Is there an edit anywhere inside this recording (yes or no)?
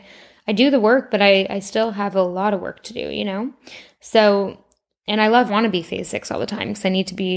yes